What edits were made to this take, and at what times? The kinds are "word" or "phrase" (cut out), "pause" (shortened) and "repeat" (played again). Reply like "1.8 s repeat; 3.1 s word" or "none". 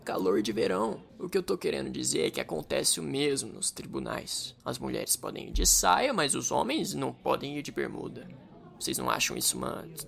1.1 s pause; 4.6 s pause